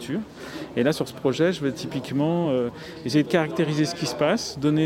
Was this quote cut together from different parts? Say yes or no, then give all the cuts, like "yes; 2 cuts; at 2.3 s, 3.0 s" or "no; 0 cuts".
no; 0 cuts